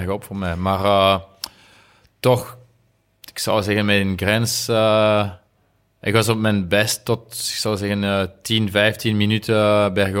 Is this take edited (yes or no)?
no